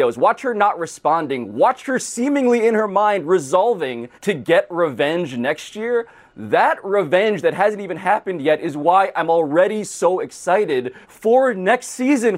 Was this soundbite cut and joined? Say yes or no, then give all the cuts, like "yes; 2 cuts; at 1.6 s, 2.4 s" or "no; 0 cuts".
yes; 2 cuts; at 4.1 s, 11.0 s